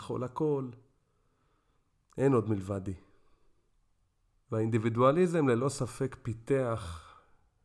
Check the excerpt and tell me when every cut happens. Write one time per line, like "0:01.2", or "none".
none

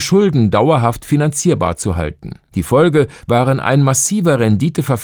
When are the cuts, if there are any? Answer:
0:02.4

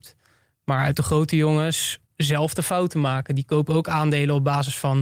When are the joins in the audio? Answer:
0:00.9
0:02.1

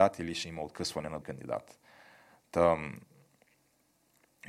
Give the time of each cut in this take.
0:01.2

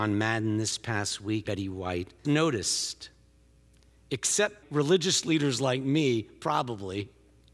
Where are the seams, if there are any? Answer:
0:01.4
0:02.2
0:04.6

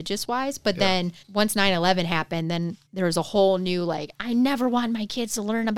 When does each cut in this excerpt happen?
0:01.2
0:02.9

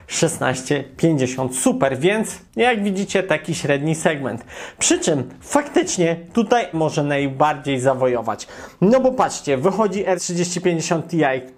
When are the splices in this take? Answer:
0:02.5
0:06.7
0:10.2

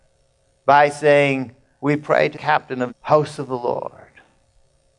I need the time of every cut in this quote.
0:02.3
0:02.9

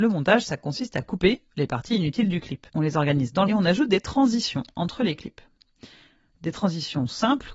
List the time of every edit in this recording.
0:02.7
0:03.5

